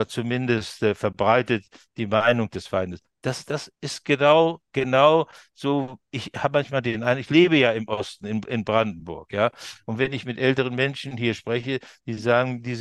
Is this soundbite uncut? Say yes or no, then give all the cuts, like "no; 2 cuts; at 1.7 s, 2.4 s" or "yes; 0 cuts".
yes; 0 cuts